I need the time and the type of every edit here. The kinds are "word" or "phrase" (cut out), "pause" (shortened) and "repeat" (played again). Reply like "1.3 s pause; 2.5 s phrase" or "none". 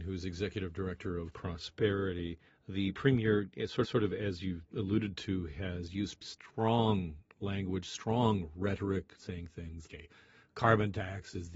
1.3 s word; 2.5 s pause; 3.8 s repeat; 4.7 s pause; 6.2 s word; 9.9 s word